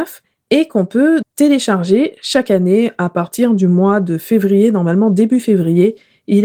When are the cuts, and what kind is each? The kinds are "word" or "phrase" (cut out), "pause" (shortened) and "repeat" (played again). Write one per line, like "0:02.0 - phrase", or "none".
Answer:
0:01.2 - word